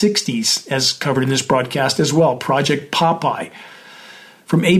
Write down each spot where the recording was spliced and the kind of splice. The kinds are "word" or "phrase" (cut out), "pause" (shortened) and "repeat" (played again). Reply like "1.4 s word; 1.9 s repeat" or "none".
none